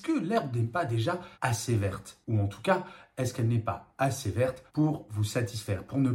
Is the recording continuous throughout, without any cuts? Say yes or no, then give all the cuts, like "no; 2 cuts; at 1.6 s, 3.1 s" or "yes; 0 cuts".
no; 2 cuts; at 1.3 s, 4.7 s